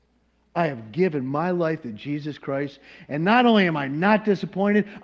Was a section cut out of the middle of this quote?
no; 0 cuts

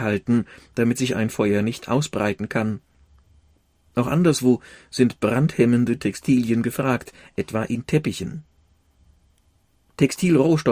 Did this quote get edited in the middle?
no; 0 cuts

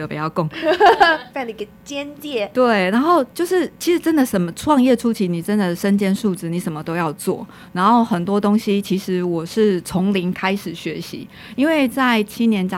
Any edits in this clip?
no; 0 cuts

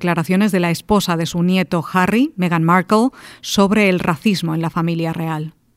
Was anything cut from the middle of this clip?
no; 0 cuts

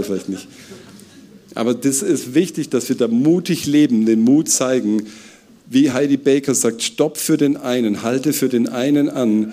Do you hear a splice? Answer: no; 0 cuts

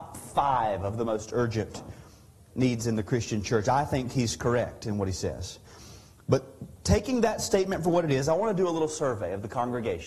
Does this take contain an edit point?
no; 0 cuts

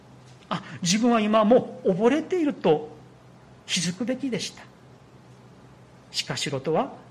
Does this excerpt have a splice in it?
no; 0 cuts

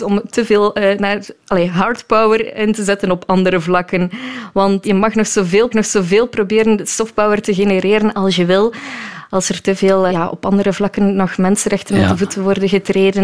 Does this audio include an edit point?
yes; 3 cuts; at 4.8 s, 5.7 s, 10.1 s

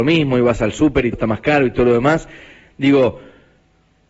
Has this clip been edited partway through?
yes; 1 cut; at 1.1 s

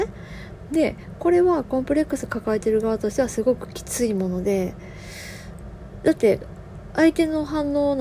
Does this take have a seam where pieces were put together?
no; 0 cuts

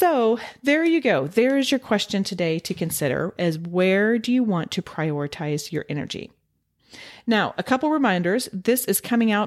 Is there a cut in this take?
no; 0 cuts

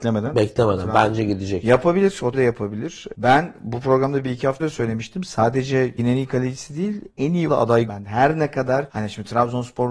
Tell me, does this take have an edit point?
yes; 6 cuts; at 2.3 s, 4.6 s, 6.0 s, 7.1 s, 7.5 s, 7.9 s

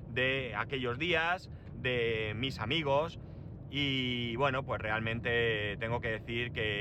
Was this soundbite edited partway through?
no; 0 cuts

